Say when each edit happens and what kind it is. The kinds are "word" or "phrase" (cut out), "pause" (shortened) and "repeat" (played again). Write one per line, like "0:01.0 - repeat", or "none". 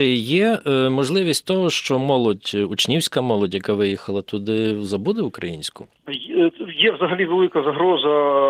0:06.0 - pause